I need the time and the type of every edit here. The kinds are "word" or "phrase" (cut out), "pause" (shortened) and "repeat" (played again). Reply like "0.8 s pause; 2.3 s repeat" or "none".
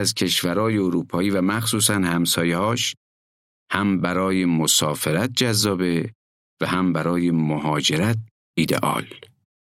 none